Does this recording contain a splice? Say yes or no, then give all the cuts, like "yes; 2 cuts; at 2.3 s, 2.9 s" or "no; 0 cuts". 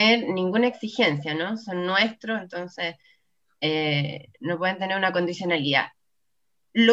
no; 0 cuts